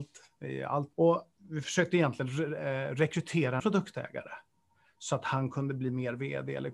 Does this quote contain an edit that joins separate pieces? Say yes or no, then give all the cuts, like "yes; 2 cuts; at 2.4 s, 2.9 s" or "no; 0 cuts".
yes; 3 cuts; at 0.9 s, 1.4 s, 3.6 s